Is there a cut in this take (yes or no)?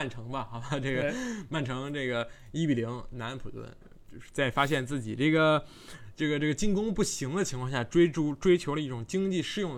no